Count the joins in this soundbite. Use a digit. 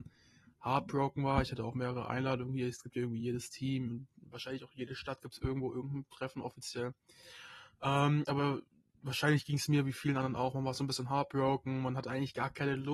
0